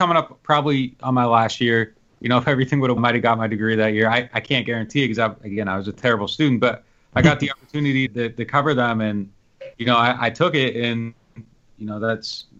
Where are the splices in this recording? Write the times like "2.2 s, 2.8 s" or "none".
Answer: 2.1 s, 3.0 s, 8.1 s, 9.7 s